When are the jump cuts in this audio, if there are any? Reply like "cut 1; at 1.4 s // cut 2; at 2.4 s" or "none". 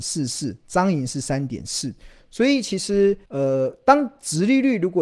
cut 1; at 3.2 s